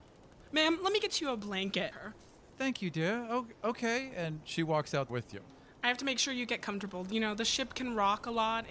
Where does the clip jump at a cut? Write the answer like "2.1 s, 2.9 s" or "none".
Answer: 1.9 s, 5.1 s